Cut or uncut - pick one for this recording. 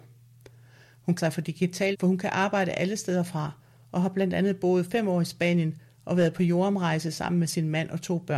cut